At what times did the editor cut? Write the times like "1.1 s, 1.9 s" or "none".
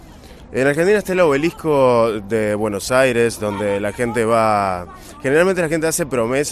none